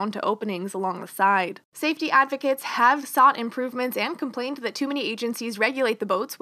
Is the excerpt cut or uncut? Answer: cut